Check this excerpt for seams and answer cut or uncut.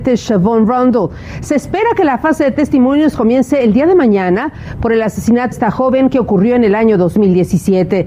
cut